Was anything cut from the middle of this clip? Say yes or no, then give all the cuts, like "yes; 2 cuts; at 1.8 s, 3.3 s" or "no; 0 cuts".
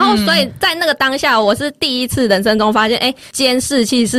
no; 0 cuts